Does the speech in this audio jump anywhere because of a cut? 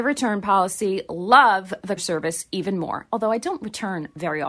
yes; 1 cut; at 2.0 s

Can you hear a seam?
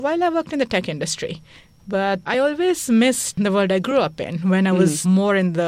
no; 0 cuts

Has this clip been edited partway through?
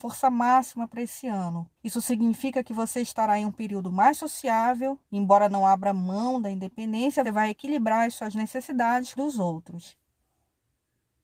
yes; 4 cuts; at 1.8 s, 5.0 s, 7.2 s, 9.2 s

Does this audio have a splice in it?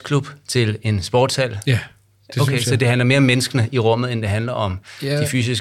no; 0 cuts

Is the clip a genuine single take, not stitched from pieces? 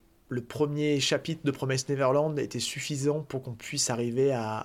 yes; 0 cuts

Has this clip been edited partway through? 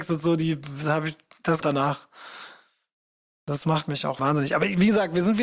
yes; 2 cuts; at 1.6 s, 4.2 s

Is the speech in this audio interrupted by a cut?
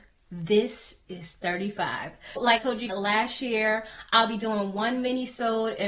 yes; 2 cuts; at 2.6 s, 2.9 s

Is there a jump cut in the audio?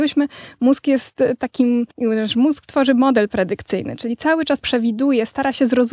yes; 2 cuts; at 1.9 s, 4.6 s

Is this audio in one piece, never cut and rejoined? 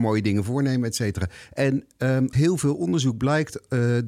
no; 1 cut; at 2.3 s

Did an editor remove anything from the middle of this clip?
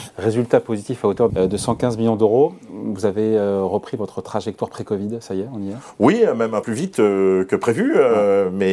yes; 2 cuts; at 1.3 s, 6.6 s

